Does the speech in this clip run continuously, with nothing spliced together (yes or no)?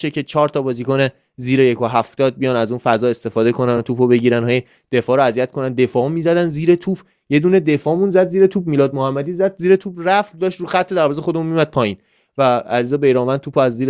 yes